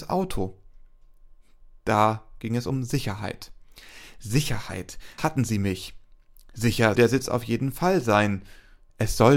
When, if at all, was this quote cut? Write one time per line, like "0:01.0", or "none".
0:05.2
0:07.0